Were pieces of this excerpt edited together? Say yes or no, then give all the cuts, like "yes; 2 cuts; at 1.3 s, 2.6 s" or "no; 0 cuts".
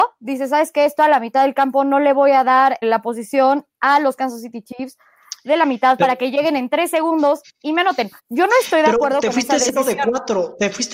yes; 2 cuts; at 2.8 s, 8.2 s